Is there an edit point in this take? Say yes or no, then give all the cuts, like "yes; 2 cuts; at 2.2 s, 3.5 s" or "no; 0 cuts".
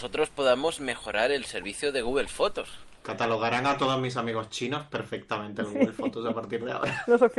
no; 0 cuts